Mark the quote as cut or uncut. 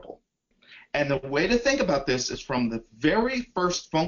uncut